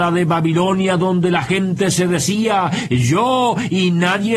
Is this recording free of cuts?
yes; 0 cuts

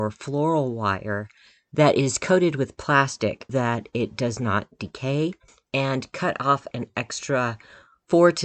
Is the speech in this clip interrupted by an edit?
yes; 2 cuts; at 3.5 s, 6.7 s

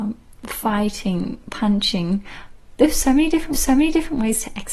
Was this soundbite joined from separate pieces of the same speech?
yes; 1 cut; at 3.5 s

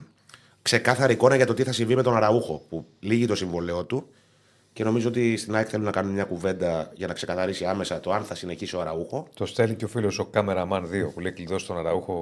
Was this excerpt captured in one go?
yes; 0 cuts

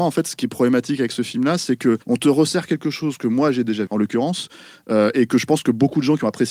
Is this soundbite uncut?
no; 2 cuts; at 2.0 s, 3.9 s

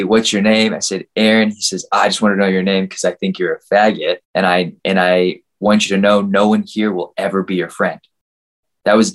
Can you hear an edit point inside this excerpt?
yes; 2 cuts; at 4.2 s, 4.8 s

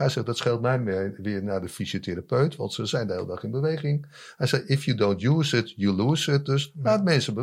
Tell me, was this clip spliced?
no; 0 cuts

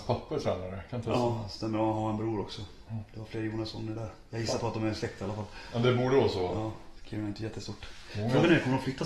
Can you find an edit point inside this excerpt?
no; 0 cuts

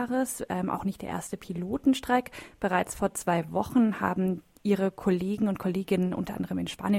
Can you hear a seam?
no; 0 cuts

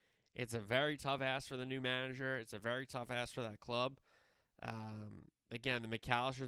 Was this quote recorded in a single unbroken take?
yes; 0 cuts

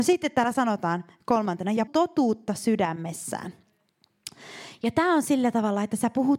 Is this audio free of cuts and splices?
no; 1 cut; at 1.9 s

